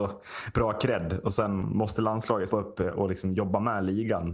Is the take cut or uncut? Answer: cut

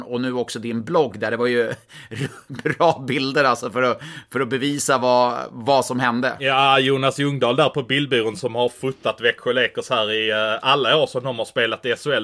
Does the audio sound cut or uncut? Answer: uncut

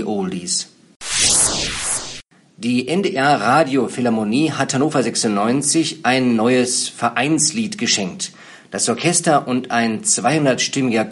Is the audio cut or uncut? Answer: uncut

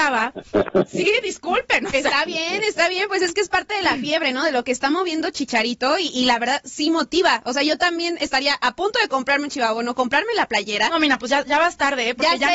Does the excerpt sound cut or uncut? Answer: uncut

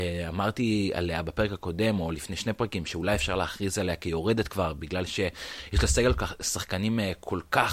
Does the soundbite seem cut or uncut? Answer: uncut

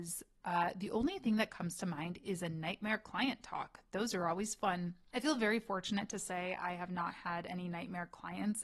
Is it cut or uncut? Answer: uncut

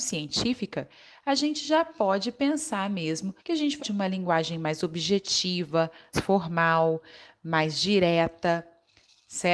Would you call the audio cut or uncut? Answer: cut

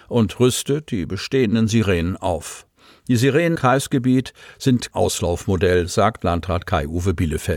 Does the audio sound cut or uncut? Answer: cut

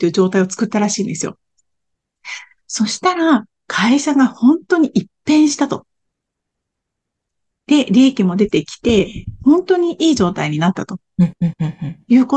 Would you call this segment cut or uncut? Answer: uncut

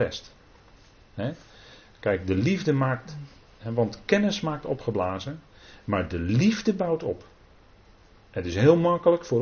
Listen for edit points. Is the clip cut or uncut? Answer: uncut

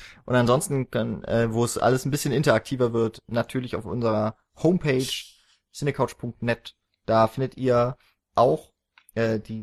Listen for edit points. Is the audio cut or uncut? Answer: uncut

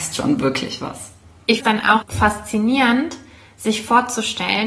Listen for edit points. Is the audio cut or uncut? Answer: cut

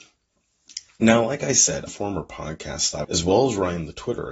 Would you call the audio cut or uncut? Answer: cut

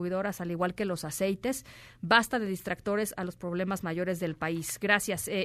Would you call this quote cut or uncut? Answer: uncut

